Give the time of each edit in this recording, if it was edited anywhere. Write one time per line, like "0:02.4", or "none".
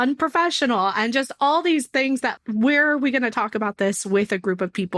0:02.4

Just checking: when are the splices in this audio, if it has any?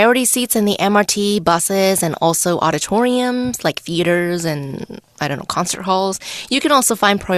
none

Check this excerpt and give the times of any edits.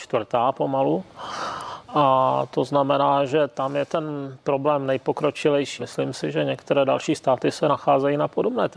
0:01.8
0:05.8

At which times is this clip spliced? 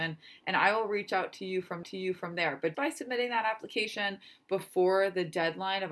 0:01.8
0:02.7

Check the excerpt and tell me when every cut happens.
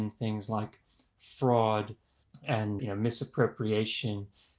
0:02.8

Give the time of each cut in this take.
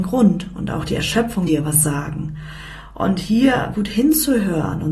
0:01.5
0:03.7

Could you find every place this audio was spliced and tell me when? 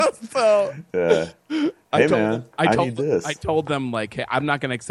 none

